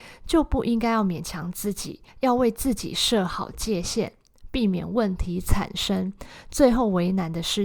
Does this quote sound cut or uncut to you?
cut